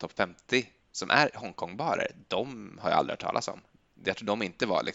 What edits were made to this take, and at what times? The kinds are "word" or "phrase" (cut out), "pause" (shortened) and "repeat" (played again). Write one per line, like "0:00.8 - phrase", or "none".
none